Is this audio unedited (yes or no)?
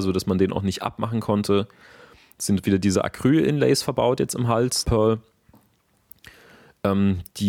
no